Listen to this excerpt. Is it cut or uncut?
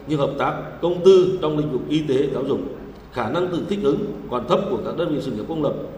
uncut